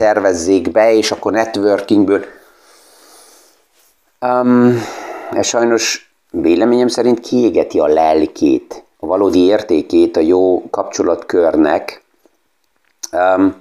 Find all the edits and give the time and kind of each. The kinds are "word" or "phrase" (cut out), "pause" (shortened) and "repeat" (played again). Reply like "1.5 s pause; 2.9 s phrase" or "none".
8.9 s pause